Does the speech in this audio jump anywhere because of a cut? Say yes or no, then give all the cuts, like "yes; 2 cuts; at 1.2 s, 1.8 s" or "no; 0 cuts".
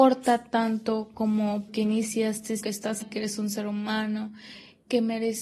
yes; 3 cuts; at 1.7 s, 2.6 s, 3.0 s